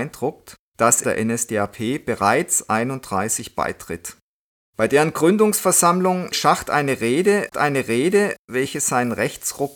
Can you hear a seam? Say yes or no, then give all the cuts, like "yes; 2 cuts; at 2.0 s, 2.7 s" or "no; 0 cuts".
yes; 4 cuts; at 1.0 s, 4.5 s, 6.3 s, 7.5 s